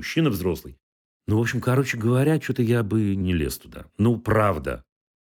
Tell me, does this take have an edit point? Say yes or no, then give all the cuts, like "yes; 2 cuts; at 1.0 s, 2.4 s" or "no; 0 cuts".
yes; 1 cut; at 3.9 s